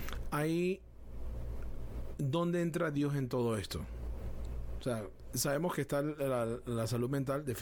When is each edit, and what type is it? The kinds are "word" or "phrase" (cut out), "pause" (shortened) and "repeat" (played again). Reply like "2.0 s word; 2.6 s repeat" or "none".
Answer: none